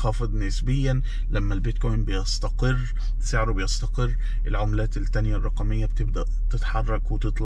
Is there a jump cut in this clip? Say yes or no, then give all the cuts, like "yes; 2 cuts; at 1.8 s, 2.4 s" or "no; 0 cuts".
no; 0 cuts